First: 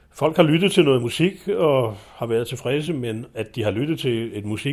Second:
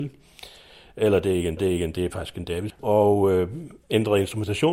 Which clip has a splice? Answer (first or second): second